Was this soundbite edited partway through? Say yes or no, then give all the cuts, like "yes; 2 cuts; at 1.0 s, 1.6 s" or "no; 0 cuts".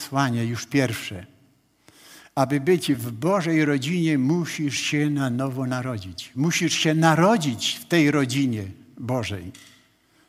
no; 0 cuts